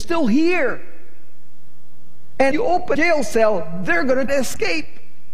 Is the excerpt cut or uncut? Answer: cut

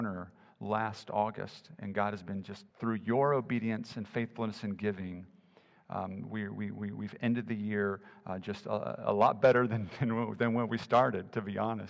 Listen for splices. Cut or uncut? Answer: cut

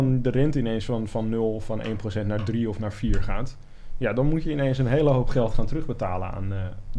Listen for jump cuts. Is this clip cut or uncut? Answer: uncut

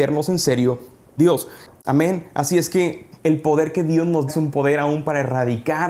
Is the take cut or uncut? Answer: cut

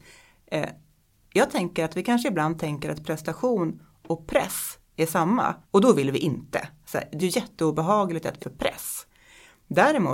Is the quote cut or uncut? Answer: cut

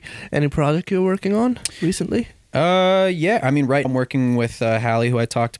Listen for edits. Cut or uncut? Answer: cut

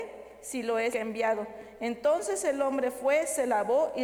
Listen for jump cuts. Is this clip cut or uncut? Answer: cut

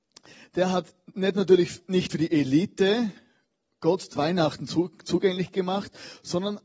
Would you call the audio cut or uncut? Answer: cut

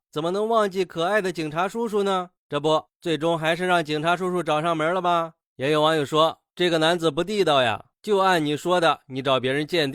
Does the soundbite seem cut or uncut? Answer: uncut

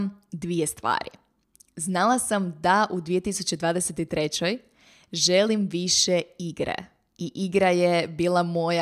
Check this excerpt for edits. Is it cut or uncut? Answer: uncut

